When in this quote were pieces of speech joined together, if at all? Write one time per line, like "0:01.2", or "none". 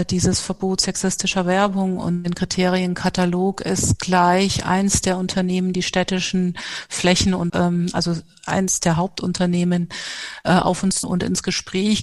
0:05.7
0:07.5
0:11.0